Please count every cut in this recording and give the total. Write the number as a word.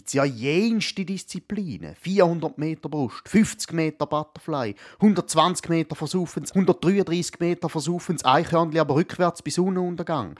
one